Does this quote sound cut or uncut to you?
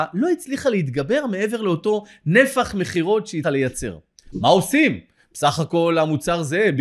cut